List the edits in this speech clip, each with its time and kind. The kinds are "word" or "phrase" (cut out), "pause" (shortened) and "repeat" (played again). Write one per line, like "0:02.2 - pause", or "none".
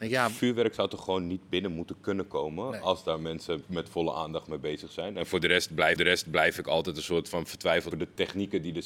0:06.0 - repeat
0:07.9 - word